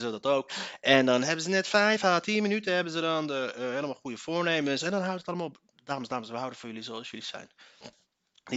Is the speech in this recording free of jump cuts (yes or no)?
yes